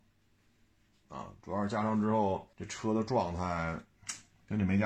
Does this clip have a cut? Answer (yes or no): yes